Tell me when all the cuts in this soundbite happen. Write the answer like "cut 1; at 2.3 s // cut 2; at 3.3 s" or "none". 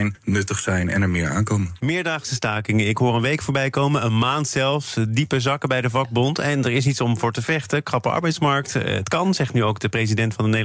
none

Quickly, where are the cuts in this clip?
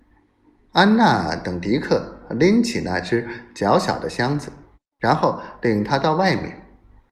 cut 1; at 4.7 s

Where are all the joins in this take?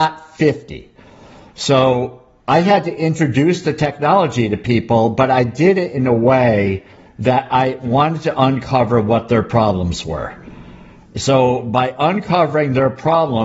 none

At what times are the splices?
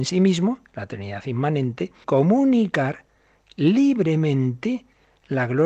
cut 1; at 2.0 s

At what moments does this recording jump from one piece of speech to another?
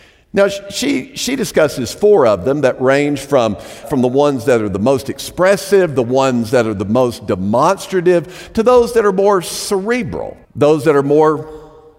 cut 1; at 3.8 s // cut 2; at 10.4 s

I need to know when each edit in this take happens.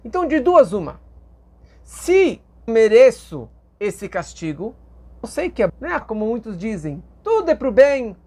cut 1; at 2.7 s // cut 2; at 5.2 s // cut 3; at 5.7 s // cut 4; at 6.0 s

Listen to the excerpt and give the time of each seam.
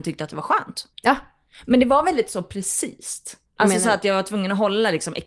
cut 1; at 0.9 s // cut 2; at 3.5 s

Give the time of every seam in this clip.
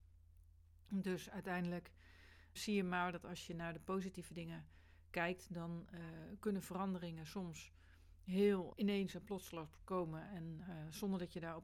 cut 1; at 2.6 s // cut 2; at 8.7 s

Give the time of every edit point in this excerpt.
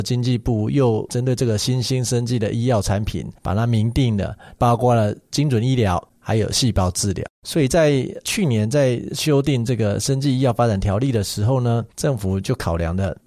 cut 1; at 3.4 s // cut 2; at 6.1 s // cut 3; at 7.3 s // cut 4; at 11.9 s

